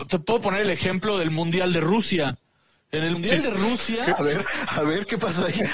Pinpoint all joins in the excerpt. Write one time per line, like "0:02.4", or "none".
0:03.1